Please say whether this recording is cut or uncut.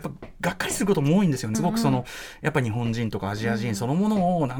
cut